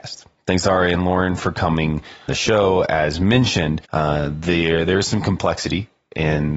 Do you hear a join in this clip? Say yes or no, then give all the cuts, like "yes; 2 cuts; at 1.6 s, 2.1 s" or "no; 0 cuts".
yes; 2 cuts; at 2.3 s, 3.8 s